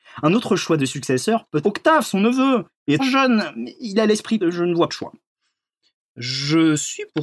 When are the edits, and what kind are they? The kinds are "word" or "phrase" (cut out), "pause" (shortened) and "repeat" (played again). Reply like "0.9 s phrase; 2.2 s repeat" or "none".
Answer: 1.6 s word; 3.0 s word; 4.4 s word; 4.9 s word